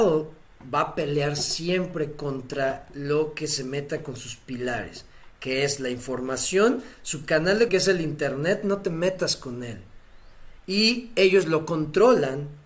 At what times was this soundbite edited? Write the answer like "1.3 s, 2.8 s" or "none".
7.7 s